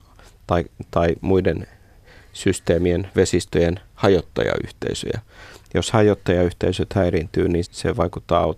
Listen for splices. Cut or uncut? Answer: cut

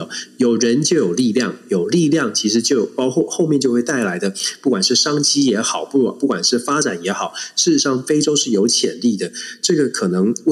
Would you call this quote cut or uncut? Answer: uncut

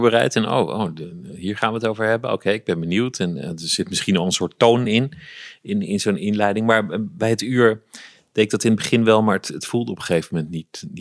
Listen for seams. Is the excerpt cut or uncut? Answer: uncut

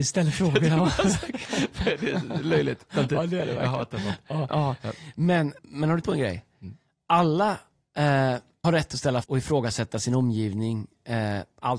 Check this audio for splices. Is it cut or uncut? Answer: cut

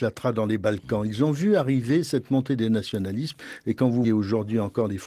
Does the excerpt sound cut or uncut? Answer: cut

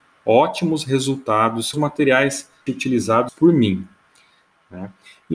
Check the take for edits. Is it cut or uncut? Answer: cut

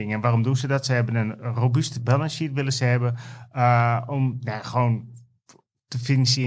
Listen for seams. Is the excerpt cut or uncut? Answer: uncut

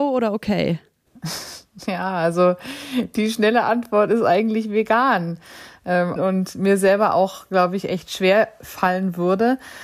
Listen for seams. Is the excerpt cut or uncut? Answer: cut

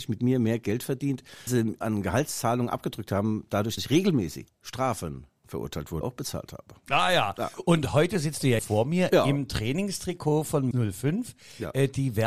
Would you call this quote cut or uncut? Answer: cut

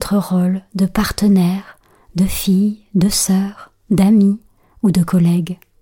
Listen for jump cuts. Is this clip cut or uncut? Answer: uncut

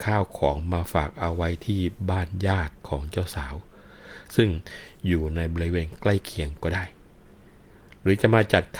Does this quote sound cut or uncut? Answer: uncut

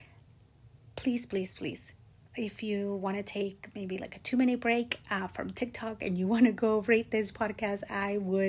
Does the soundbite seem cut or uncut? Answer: uncut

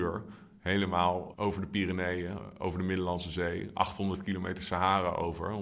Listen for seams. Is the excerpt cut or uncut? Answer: cut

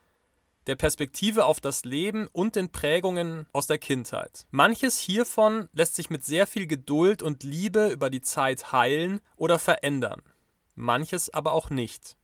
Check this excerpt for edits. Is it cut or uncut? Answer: cut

